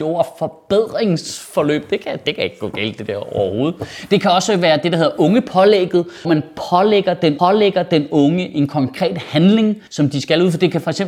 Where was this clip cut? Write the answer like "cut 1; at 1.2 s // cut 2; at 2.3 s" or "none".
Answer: cut 1; at 6.2 s // cut 2; at 7.4 s // cut 3; at 9.9 s